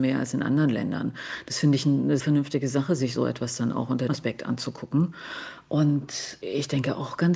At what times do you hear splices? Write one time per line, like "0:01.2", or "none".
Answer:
0:02.2
0:04.1